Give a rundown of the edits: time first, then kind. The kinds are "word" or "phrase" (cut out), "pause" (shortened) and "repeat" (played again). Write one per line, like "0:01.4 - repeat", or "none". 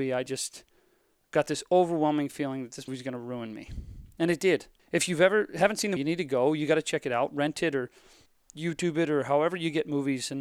0:02.9 - word
0:04.8 - pause
0:06.0 - word
0:08.3 - pause